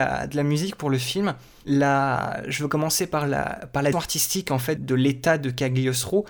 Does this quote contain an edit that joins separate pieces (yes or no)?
yes